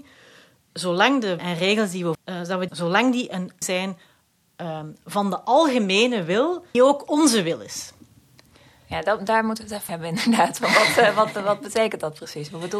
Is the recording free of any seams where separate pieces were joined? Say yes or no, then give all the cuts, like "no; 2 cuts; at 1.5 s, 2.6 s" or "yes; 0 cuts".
no; 6 cuts; at 1.4 s, 2.1 s, 2.7 s, 3.6 s, 6.7 s, 9.9 s